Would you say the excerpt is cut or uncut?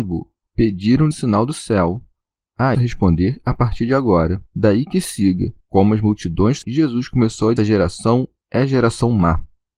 cut